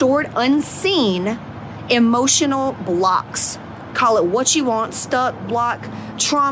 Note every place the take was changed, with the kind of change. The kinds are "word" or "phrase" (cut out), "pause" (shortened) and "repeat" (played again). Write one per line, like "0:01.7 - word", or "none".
none